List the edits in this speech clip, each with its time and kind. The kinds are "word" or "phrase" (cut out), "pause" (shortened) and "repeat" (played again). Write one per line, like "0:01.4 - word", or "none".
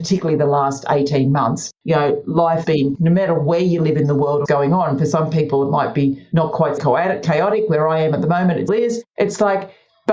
0:02.6 - word
0:02.9 - word
0:04.5 - word
0:06.8 - word
0:08.7 - word